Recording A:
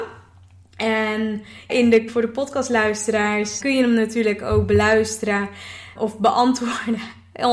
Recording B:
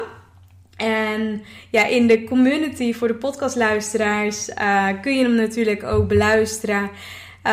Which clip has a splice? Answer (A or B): A